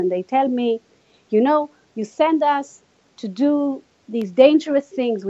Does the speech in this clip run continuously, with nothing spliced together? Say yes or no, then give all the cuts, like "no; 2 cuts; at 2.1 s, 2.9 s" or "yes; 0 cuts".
yes; 0 cuts